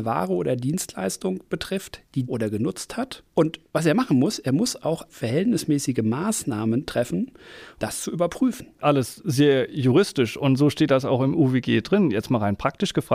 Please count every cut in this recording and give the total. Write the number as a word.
five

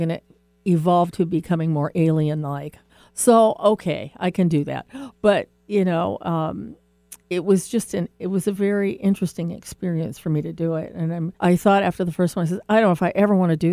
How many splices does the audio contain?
three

